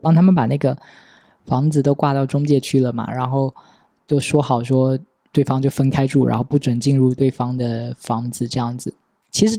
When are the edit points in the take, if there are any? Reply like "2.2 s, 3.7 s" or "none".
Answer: 5.3 s